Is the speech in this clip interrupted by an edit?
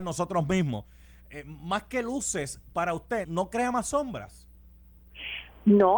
yes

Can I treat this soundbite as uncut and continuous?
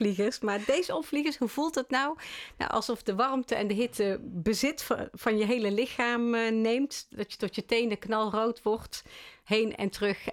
yes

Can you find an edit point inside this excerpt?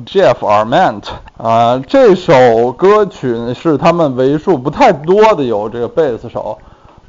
yes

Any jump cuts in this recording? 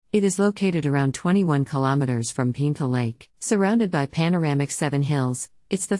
yes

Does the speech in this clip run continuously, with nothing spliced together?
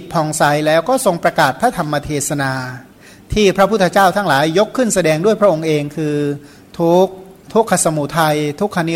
yes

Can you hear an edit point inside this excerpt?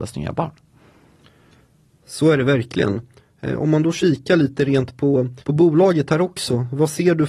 yes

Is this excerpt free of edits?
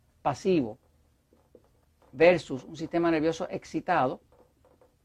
yes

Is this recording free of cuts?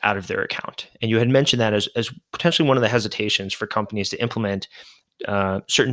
yes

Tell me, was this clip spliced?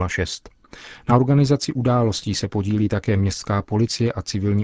no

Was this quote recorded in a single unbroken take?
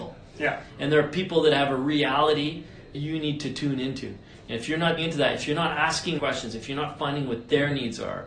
no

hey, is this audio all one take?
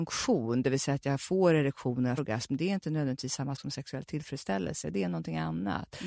no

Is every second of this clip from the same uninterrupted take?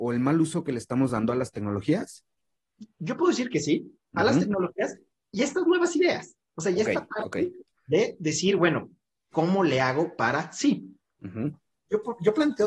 yes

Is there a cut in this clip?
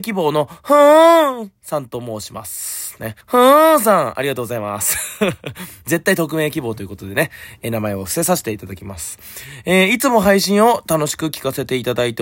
yes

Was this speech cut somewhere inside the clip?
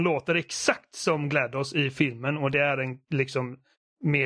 no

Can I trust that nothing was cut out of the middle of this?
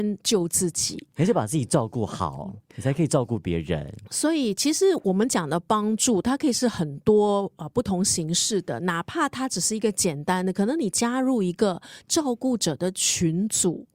no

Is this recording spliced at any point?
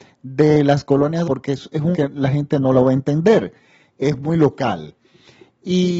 yes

